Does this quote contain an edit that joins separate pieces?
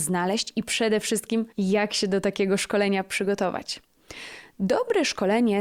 yes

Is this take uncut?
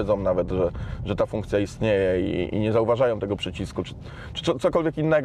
yes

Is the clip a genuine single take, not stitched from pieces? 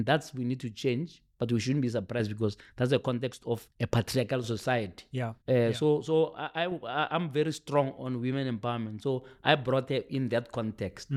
no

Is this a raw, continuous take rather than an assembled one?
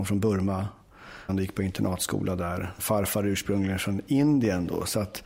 no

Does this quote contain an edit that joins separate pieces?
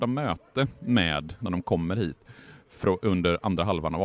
yes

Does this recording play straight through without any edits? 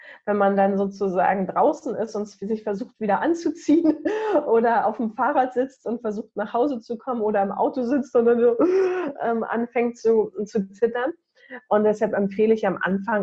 yes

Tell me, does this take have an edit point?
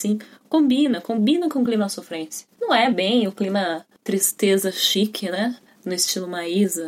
no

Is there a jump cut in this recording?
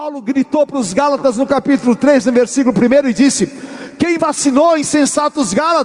yes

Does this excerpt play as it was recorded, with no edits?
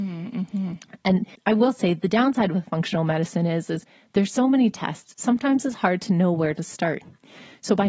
no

